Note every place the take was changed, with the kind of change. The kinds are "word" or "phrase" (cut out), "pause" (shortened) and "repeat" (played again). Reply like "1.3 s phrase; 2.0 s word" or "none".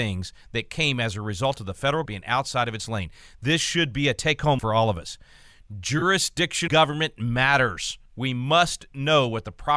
2.1 s word; 4.6 s word; 6.7 s word; 8.1 s pause